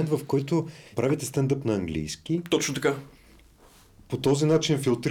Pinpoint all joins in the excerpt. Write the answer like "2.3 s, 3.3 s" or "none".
0.9 s

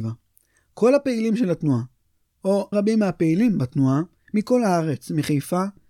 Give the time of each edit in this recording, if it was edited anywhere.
2.7 s

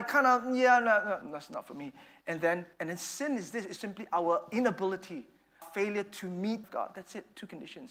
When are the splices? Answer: 1.2 s, 2.7 s, 3.8 s, 5.6 s, 6.6 s

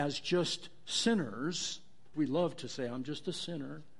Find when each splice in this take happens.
2.1 s

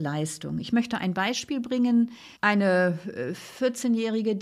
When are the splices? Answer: 2.4 s

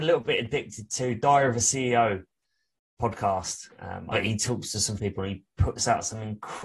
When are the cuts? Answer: 3.7 s, 4.1 s, 5.0 s

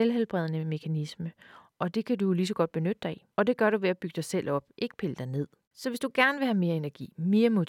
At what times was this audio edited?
3.3 s, 5.6 s

